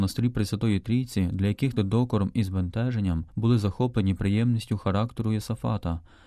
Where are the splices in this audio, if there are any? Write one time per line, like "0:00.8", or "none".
0:01.8
0:03.3